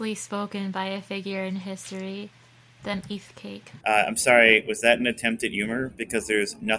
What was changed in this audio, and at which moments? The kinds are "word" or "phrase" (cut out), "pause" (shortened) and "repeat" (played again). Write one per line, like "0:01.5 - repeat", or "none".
0:02.8 - word
0:03.8 - pause

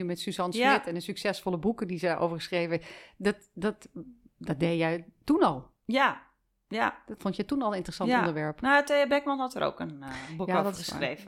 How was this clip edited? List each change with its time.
0:07.2 - word

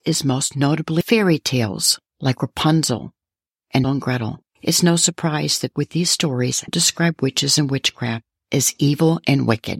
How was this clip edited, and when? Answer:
0:01.0 - phrase
0:02.1 - pause
0:03.8 - word
0:05.7 - phrase
0:06.7 - word

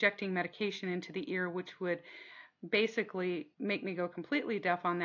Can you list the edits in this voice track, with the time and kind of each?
0:03.5 - pause

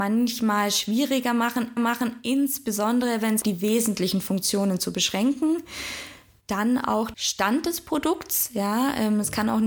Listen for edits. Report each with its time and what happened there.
0:01.8 - repeat
0:03.4 - phrase
0:07.1 - phrase

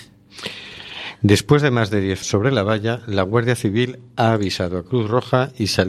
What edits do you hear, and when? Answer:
0:02.2 - word

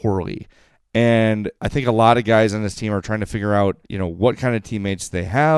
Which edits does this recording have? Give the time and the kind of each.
0:01.6 - pause
0:03.8 - pause

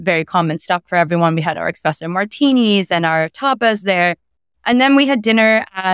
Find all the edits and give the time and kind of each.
none

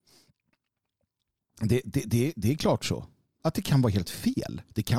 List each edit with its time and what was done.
none

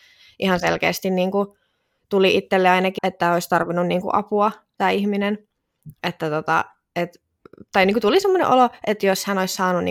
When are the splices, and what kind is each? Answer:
0:03.0 - word
0:04.0 - phrase

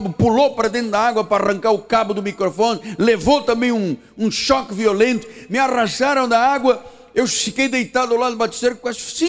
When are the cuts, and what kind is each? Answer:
none

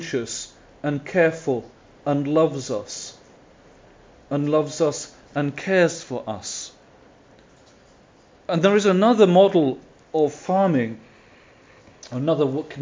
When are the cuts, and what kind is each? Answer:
none

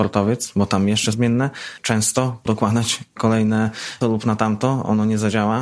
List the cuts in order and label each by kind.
0:01.1 - phrase
0:02.5 - word
0:04.0 - phrase

